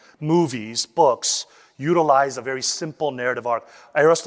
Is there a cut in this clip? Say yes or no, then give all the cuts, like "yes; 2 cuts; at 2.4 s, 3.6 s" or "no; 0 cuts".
no; 0 cuts